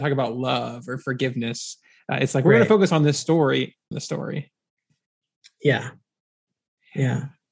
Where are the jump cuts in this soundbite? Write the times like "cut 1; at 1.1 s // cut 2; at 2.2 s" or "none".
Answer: cut 1; at 3.9 s